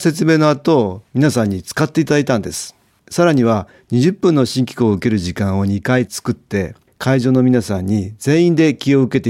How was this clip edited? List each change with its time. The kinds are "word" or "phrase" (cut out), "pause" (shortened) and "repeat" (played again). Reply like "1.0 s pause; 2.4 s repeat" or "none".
none